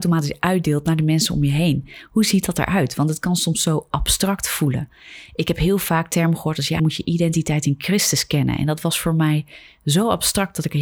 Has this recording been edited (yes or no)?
yes